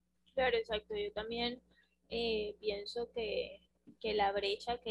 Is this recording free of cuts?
yes; 0 cuts

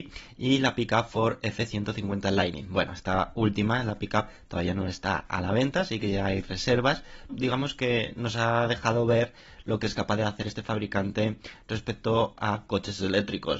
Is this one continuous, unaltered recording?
no; 1 cut; at 7.3 s

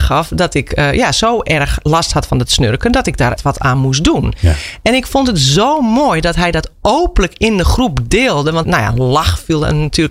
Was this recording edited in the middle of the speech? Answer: yes; 2 cuts; at 3.4 s, 8.6 s

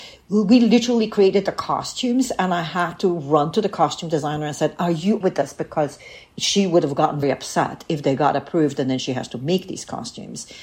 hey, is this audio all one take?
no; 2 cuts; at 5.2 s, 7.2 s

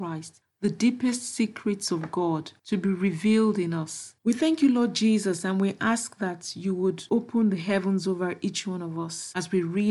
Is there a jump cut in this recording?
yes; 1 cut; at 4.2 s

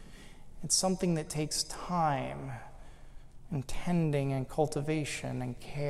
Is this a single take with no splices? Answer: yes; 0 cuts

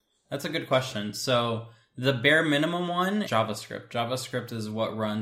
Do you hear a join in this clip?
yes; 1 cut; at 3.2 s

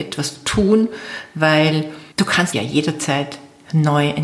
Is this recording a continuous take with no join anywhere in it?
no; 2 cuts; at 2.1 s, 2.5 s

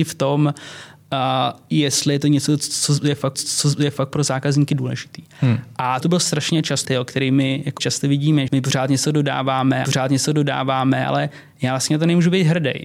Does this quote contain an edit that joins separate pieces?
yes; 6 cuts; at 3.3 s, 6.0 s, 6.8 s, 7.8 s, 8.5 s, 9.8 s

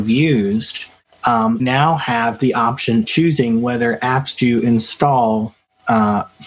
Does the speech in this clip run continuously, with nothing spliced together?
no; 3 cuts; at 1.6 s, 3.0 s, 4.4 s

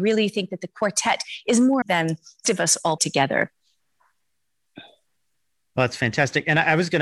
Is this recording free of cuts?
no; 3 cuts; at 1.8 s, 2.4 s, 3.0 s

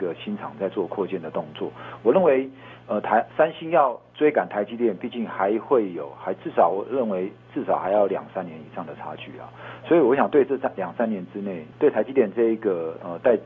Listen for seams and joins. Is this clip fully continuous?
no; 2 cuts; at 3.3 s, 11.7 s

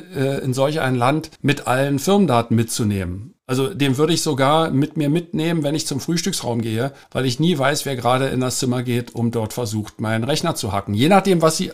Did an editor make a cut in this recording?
yes; 3 cuts; at 1.4 s, 3.4 s, 7.0 s

